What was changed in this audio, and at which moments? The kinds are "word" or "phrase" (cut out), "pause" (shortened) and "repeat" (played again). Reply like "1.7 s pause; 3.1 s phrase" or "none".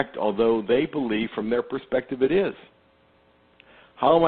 none